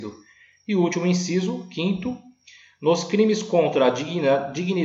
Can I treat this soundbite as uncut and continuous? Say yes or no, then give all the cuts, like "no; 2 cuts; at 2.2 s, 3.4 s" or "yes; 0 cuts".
yes; 0 cuts